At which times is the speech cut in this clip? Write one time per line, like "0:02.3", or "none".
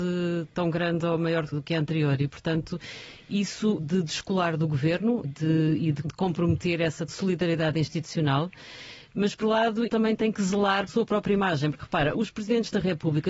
0:01.5
0:03.8
0:05.2
0:06.0
0:07.1
0:09.4
0:09.9
0:10.9
0:12.1